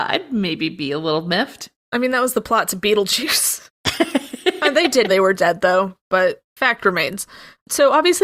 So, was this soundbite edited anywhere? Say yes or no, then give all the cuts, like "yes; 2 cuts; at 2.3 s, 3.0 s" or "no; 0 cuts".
yes; 1 cut; at 5.1 s